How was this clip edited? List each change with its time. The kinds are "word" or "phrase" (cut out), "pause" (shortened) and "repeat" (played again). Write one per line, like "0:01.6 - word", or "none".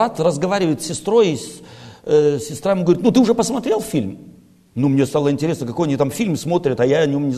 none